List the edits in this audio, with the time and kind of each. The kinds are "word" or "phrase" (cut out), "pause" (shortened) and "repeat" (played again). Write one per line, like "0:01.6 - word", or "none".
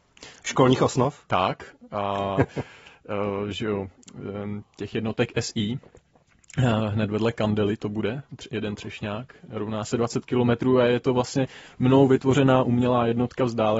none